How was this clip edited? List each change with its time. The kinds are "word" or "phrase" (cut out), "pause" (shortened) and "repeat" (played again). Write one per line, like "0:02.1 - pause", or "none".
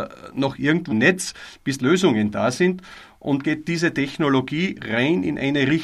0:00.9 - word
0:01.8 - word
0:03.4 - word